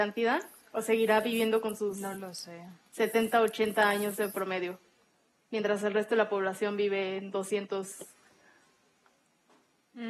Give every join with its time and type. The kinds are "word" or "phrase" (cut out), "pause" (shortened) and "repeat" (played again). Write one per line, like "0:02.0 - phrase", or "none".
none

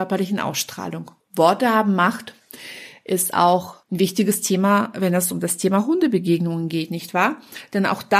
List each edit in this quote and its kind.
0:01.2 - pause
0:03.8 - pause

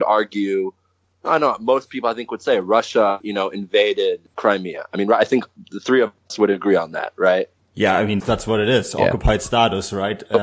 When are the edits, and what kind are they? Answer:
0:03.2 - word
0:04.3 - word
0:08.2 - word

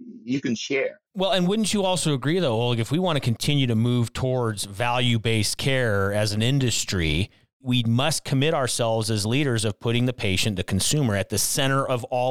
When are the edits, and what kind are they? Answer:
0:01.1 - pause

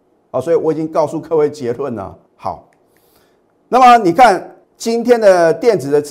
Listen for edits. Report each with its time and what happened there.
0:02.3 - pause
0:04.6 - pause

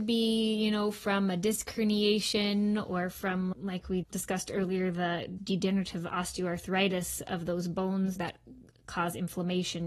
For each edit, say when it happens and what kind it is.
0:03.5 - word
0:04.0 - word
0:05.4 - word
0:08.2 - word

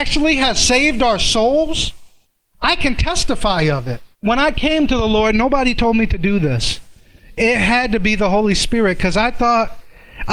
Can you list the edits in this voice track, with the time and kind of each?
0:02.2 - pause
0:04.1 - pause

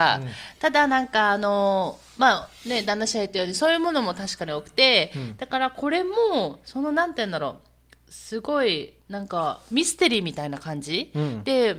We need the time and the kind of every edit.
none

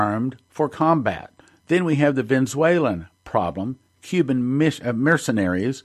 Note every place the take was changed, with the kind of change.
0:01.4 - pause

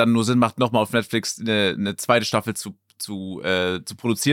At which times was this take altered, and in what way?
none

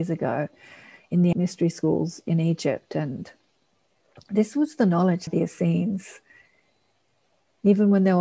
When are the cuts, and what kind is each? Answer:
0:01.3 - word
0:05.3 - phrase

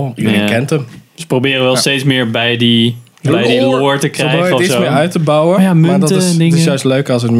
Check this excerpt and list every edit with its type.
0:03.1 - pause

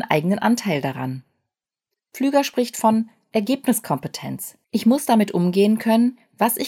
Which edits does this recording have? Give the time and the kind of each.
0:04.6 - pause

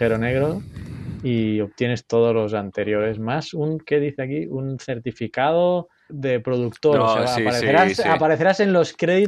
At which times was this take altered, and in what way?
0:06.1 - word

